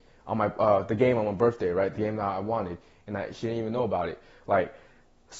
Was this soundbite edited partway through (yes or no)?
no